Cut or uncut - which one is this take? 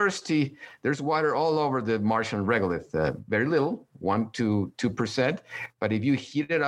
uncut